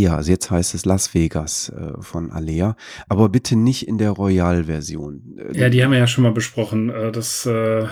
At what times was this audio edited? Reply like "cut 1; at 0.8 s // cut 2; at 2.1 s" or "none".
none